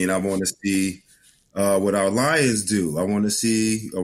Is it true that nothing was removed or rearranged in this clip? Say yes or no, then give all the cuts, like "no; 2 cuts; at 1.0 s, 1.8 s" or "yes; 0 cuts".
yes; 0 cuts